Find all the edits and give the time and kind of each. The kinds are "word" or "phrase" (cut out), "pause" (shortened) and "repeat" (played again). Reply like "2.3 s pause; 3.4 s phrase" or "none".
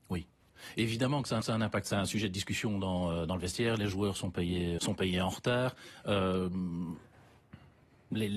1.4 s repeat; 4.8 s word